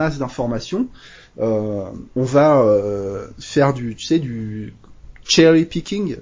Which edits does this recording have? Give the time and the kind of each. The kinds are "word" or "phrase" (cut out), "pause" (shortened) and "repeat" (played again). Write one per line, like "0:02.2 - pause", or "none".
0:02.1 - pause